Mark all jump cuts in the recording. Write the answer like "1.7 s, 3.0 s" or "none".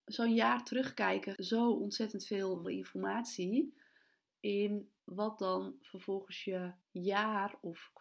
1.4 s, 2.6 s, 5.0 s, 6.8 s